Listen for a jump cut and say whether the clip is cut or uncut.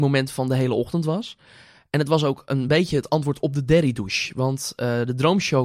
uncut